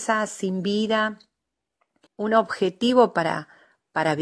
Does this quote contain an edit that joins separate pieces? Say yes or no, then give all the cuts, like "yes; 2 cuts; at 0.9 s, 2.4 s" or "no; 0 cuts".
yes; 1 cut; at 2.1 s